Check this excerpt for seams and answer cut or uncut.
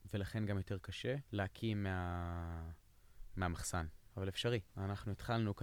cut